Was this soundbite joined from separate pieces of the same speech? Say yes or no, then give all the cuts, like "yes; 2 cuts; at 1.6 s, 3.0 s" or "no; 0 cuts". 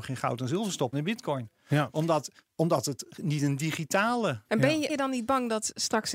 yes; 4 cuts; at 0.9 s, 2.4 s, 4.4 s, 4.9 s